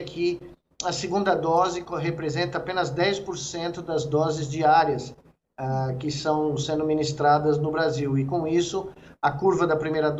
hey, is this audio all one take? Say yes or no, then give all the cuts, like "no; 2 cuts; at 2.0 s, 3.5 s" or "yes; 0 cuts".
yes; 0 cuts